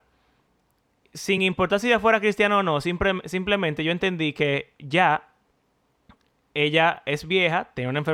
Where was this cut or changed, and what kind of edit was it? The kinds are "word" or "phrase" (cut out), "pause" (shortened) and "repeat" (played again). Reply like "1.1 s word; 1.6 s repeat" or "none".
none

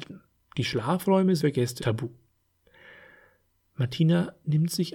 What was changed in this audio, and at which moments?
1.4 s word; 1.8 s word

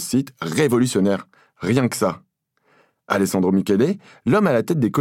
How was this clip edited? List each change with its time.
none

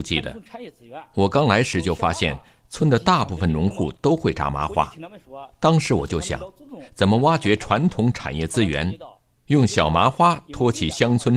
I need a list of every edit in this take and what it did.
none

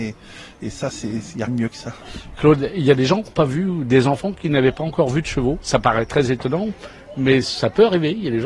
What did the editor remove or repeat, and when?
1.5 s word; 3.3 s phrase

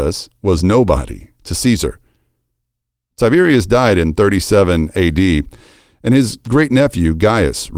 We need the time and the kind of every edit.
none

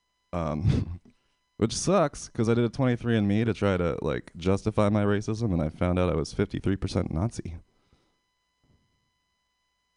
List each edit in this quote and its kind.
none

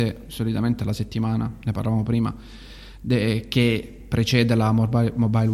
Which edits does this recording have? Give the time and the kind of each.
none

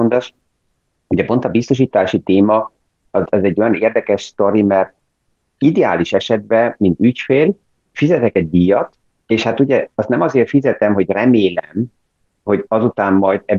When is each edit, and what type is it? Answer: 3.3 s word; 7.7 s pause; 9.0 s pause

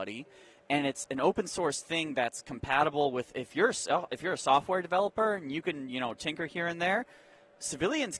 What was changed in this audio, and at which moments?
none

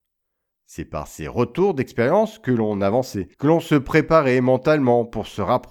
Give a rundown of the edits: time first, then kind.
3.3 s pause

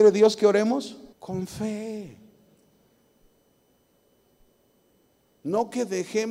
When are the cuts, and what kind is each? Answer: 1.1 s pause

